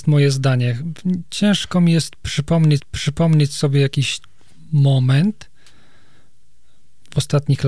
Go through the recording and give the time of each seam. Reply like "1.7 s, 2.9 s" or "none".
2.8 s